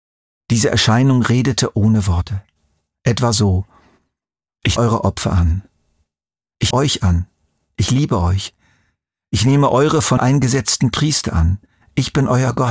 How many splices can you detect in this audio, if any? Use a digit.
3